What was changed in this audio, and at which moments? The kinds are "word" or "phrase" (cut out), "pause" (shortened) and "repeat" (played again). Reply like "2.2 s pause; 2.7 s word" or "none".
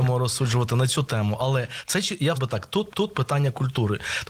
2.3 s word; 2.9 s repeat